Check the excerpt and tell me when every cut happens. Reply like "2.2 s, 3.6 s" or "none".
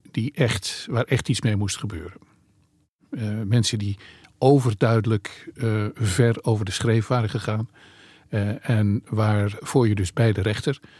none

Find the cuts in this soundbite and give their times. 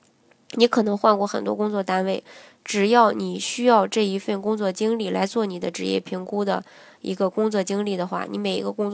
none

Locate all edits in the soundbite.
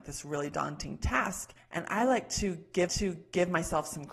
2.9 s

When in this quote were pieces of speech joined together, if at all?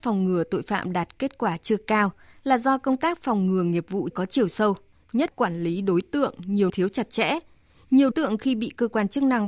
4.1 s, 5.3 s, 6.7 s, 8.1 s

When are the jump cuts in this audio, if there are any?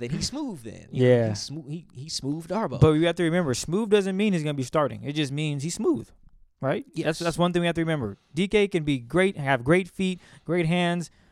none

